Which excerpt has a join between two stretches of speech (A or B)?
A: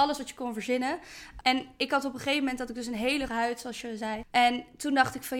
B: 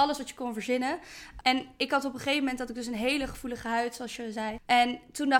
A